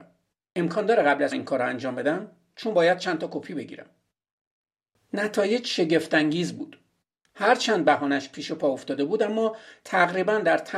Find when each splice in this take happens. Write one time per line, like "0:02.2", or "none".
0:01.3